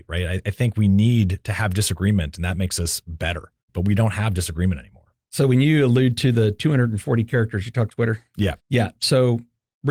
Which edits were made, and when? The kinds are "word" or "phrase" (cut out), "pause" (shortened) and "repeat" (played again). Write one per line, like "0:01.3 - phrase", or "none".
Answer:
0:03.6 - pause
0:07.9 - word
0:08.6 - pause